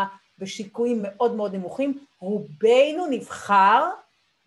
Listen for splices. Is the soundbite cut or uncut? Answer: uncut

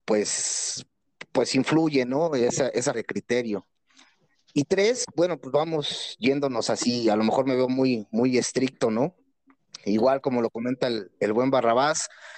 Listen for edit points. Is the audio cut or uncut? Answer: cut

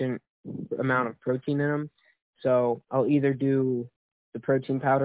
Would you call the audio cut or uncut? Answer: uncut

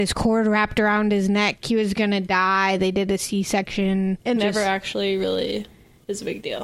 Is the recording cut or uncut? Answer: cut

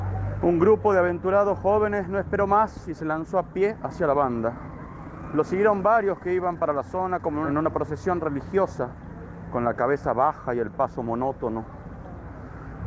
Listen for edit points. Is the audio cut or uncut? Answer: uncut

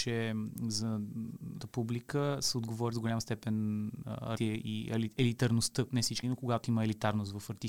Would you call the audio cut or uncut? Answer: cut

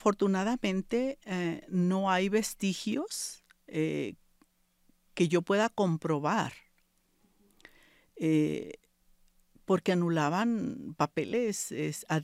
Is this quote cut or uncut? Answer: uncut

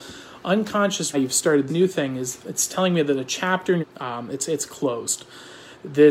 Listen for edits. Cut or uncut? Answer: cut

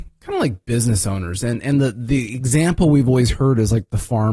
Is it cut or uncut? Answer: uncut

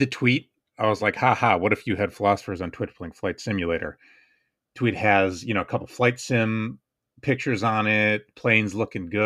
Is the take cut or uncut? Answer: uncut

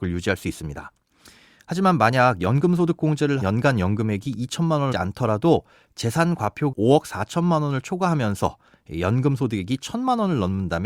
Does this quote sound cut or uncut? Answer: cut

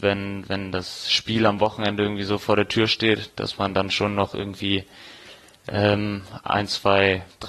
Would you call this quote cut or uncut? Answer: uncut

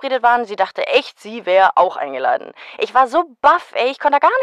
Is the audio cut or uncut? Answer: uncut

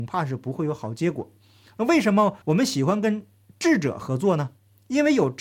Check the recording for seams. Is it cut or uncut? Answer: cut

